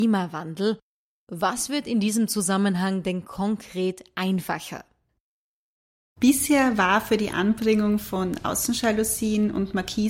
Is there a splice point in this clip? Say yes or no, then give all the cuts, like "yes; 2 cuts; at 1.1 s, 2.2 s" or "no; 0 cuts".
no; 0 cuts